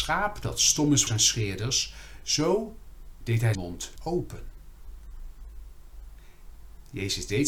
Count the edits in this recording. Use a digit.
3